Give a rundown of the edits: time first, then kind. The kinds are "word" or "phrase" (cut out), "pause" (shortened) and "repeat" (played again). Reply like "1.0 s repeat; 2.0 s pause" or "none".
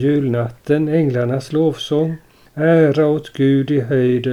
none